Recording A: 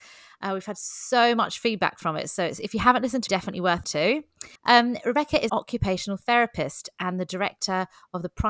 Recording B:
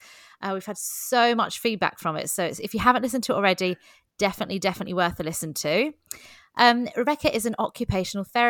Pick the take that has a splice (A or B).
A